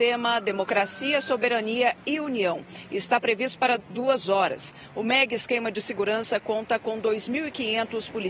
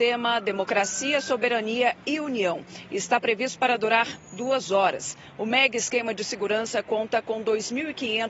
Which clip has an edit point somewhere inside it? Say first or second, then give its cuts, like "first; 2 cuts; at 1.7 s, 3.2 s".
first; 1 cut; at 3.8 s